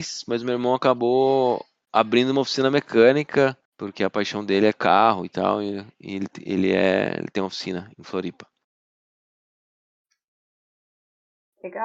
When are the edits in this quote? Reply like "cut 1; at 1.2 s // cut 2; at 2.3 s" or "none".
cut 1; at 3.6 s